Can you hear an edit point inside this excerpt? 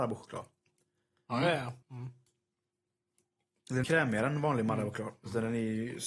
yes; 2 cuts; at 1.8 s, 3.8 s

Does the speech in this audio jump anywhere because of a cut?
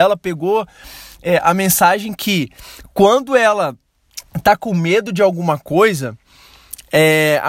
no; 0 cuts

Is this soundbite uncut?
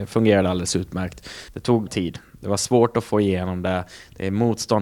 no; 2 cuts; at 1.5 s, 1.9 s

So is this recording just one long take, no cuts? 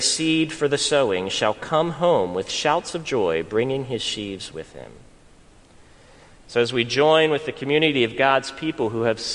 yes; 0 cuts

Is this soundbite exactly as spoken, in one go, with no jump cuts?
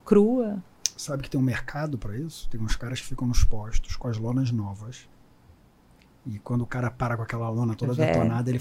yes; 0 cuts

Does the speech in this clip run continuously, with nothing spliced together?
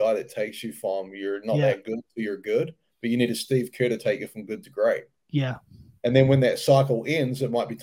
yes; 0 cuts

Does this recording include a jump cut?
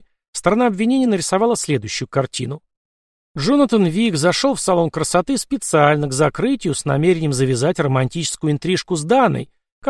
no; 0 cuts

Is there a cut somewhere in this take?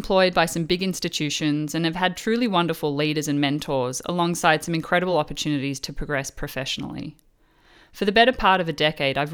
no; 0 cuts

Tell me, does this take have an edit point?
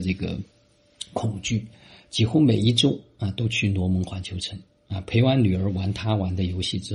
no; 0 cuts

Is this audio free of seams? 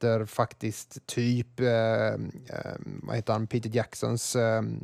yes; 0 cuts

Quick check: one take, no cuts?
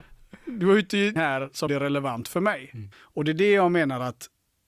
no; 3 cuts; at 1.2 s, 1.7 s, 2.9 s

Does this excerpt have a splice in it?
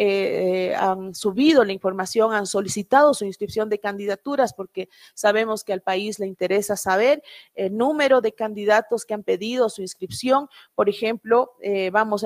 no; 0 cuts

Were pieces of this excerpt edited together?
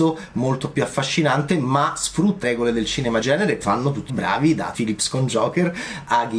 yes; 5 cuts; at 2.4 s, 3.2 s, 3.6 s, 4.1 s, 4.7 s

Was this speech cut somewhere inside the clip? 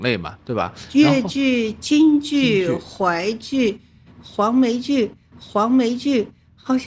yes; 1 cut; at 5.3 s

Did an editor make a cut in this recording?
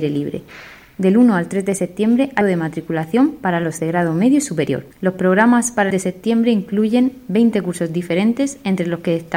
yes; 4 cuts; at 2.4 s, 3.8 s, 4.9 s, 5.9 s

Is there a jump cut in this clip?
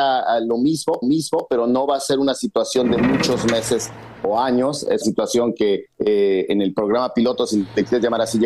yes; 3 cuts; at 1.0 s, 5.0 s, 5.9 s

